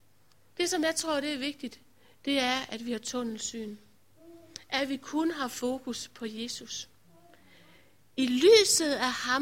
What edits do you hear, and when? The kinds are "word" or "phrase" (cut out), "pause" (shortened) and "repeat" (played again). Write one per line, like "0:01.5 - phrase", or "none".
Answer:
none

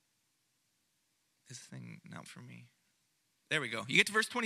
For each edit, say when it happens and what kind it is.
0:01.6 - word
0:02.3 - word
0:03.1 - pause

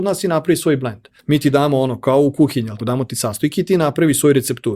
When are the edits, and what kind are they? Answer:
0:01.2 - pause
0:02.8 - word

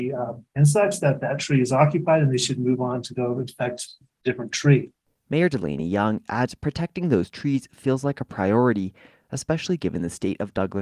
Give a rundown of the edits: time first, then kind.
none

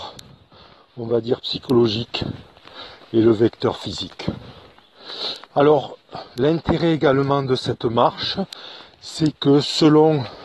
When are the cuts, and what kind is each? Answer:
0:05.4 - pause

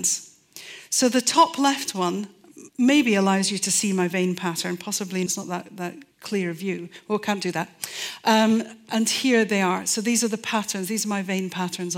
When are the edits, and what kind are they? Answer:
0:02.7 - pause
0:05.3 - word
0:06.1 - pause

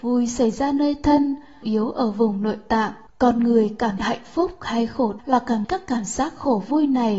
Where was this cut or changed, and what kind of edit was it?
0:01.6 - word
0:03.1 - pause
0:04.0 - word
0:05.2 - word
0:05.6 - word

